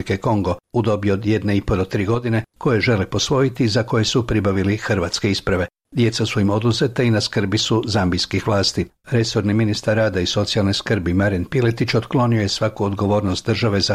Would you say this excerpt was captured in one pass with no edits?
yes; 0 cuts

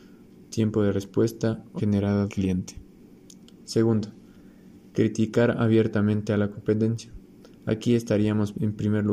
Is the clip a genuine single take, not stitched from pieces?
no; 2 cuts; at 1.8 s, 2.3 s

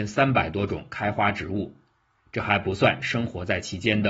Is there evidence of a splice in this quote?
no; 0 cuts

